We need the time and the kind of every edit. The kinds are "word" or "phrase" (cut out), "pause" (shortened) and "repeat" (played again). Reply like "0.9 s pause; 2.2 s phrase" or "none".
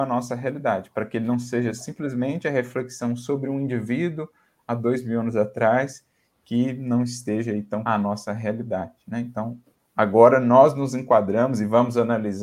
7.9 s word